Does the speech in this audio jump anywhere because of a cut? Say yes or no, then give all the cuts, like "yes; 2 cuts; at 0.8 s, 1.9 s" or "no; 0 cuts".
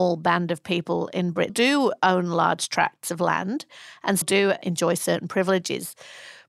yes; 2 cuts; at 1.5 s, 4.2 s